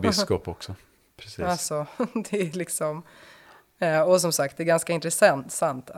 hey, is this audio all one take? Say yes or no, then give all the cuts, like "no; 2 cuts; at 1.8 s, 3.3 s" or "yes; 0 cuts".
yes; 0 cuts